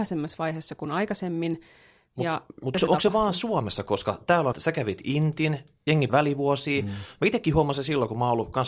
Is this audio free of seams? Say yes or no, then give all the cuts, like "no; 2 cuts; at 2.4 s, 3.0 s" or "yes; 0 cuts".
no; 3 cuts; at 2.7 s, 4.5 s, 6.1 s